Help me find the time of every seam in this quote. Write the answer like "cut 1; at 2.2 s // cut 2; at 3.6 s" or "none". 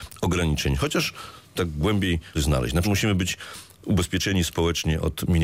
cut 1; at 1.5 s // cut 2; at 2.3 s // cut 3; at 2.8 s

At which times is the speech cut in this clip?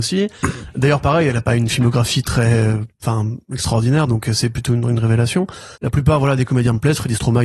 cut 1; at 5.7 s

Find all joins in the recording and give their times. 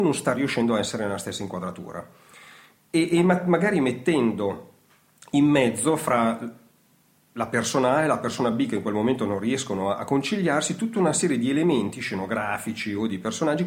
none

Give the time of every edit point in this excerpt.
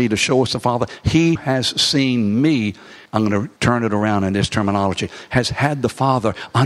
cut 1; at 1.4 s // cut 2; at 3.1 s // cut 3; at 3.6 s

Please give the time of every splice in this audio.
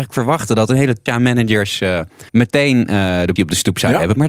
cut 1; at 1.1 s // cut 2; at 2.3 s // cut 3; at 3.4 s

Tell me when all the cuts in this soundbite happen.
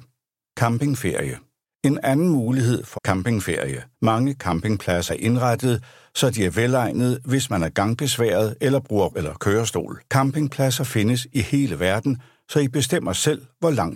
cut 1; at 2.9 s // cut 2; at 3.9 s // cut 3; at 5.1 s // cut 4; at 9.1 s // cut 5; at 10.1 s

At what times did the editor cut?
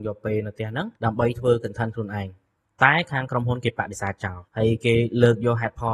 cut 1; at 1.0 s // cut 2; at 2.6 s // cut 3; at 4.5 s

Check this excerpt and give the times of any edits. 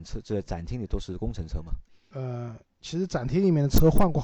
none

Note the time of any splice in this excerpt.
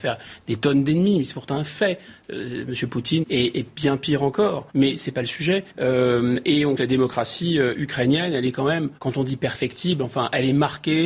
cut 1; at 3.2 s // cut 2; at 4.7 s // cut 3; at 5.7 s // cut 4; at 6.8 s // cut 5; at 9.0 s

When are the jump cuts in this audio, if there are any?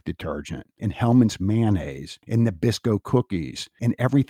none

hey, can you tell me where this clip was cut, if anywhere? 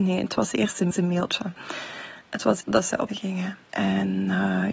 cut 1; at 0.9 s // cut 2; at 2.6 s // cut 3; at 3.1 s // cut 4; at 3.6 s

